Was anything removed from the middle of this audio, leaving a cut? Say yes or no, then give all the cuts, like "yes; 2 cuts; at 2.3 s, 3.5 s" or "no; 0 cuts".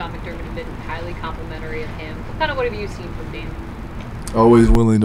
no; 0 cuts